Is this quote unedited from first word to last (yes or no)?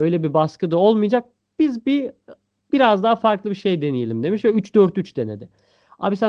yes